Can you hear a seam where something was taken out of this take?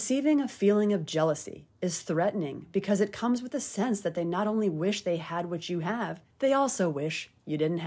yes; 1 cut; at 6.3 s

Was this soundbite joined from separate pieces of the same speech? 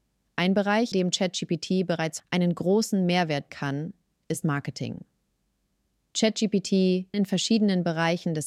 yes; 5 cuts; at 0.9 s, 2.2 s, 3.5 s, 4.4 s, 7.1 s

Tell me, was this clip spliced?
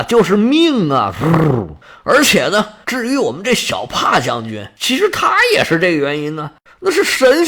no; 0 cuts

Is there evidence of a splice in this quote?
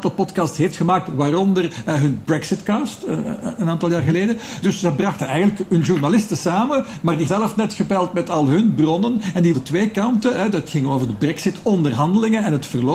yes; 2 cuts; at 7.3 s, 9.5 s

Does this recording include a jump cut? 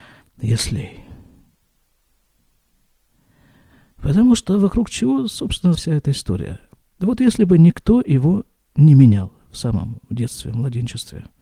yes; 1 cut; at 5.7 s

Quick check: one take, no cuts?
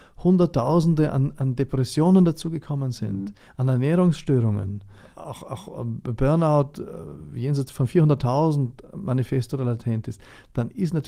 yes; 0 cuts

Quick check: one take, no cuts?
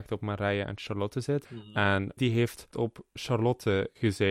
no; 2 cuts; at 2.2 s, 2.7 s

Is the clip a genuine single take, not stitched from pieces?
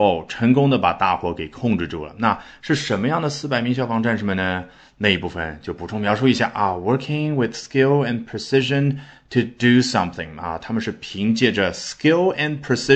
yes; 0 cuts

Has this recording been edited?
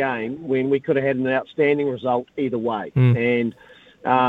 no; 0 cuts

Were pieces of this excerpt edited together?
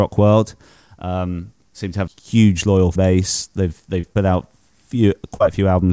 yes; 2 cuts; at 2.1 s, 3.0 s

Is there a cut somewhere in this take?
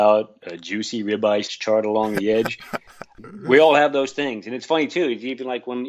yes; 1 cut; at 1.5 s

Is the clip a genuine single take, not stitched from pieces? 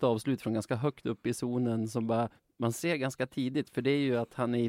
no; 1 cut; at 2.4 s

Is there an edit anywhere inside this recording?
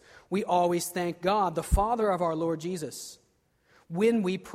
no; 0 cuts

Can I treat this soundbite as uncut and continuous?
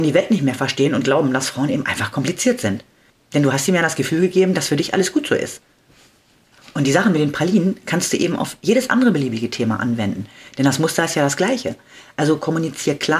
yes; 0 cuts

